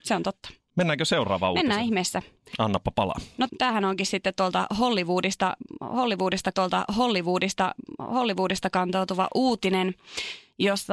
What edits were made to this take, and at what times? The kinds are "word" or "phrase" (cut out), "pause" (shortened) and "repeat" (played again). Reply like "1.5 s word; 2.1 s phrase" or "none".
3.5 s word; 6.5 s repeat